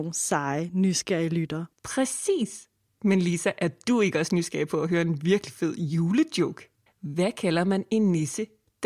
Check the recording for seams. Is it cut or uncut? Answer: cut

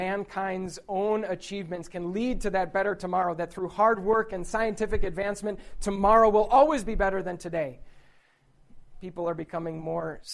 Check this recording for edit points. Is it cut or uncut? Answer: uncut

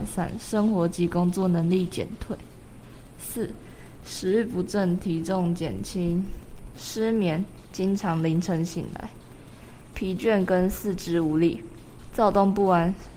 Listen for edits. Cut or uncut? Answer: cut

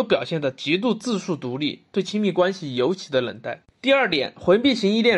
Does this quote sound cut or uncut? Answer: cut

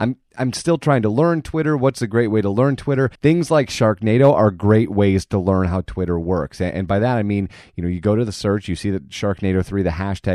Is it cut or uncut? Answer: cut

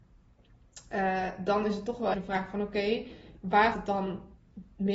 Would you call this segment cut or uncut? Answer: cut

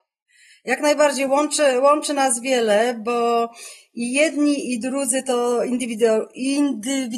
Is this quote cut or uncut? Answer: uncut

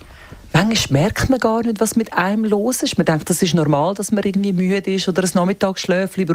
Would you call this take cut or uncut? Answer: uncut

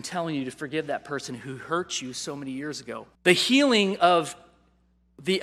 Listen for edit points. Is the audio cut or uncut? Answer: cut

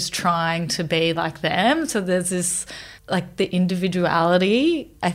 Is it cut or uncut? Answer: cut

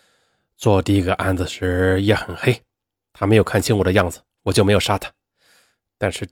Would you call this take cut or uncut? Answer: uncut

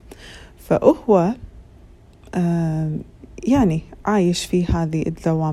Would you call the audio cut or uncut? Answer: uncut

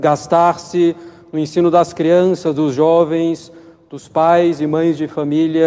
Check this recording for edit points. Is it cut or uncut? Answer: uncut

